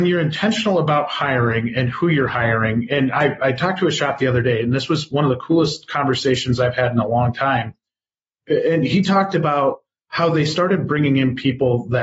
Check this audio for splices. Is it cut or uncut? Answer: uncut